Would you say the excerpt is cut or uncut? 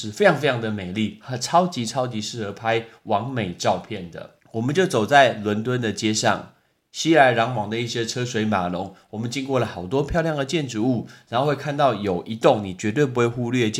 cut